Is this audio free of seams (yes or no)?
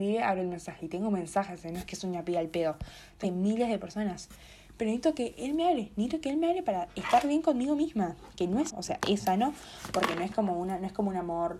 no